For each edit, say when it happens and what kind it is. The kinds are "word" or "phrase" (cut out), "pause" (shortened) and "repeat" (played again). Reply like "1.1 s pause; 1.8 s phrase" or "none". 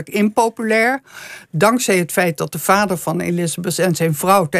none